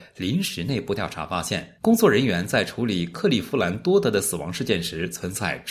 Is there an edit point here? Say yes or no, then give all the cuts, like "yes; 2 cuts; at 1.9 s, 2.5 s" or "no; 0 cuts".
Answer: yes; 1 cut; at 1.8 s